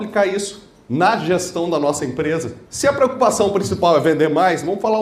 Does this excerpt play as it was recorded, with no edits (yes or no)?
no